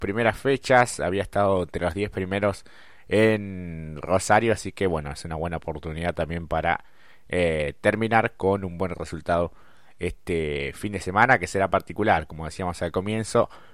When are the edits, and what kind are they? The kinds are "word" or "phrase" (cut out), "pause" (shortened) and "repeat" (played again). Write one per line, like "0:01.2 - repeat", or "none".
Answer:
none